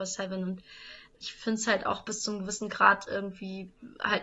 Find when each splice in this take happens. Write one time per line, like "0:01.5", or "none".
none

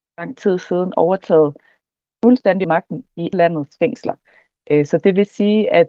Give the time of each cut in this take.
0:02.6
0:03.3

